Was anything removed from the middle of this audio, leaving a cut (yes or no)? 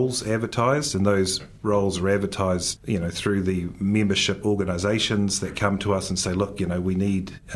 yes